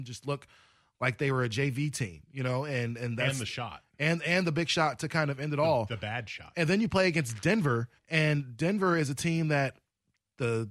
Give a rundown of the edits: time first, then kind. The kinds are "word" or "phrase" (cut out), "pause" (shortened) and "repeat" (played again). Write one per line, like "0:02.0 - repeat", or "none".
0:08.0 - pause